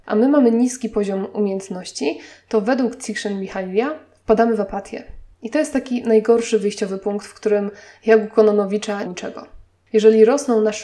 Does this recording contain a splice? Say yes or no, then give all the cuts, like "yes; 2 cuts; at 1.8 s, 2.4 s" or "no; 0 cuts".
yes; 2 cuts; at 5.3 s, 9.0 s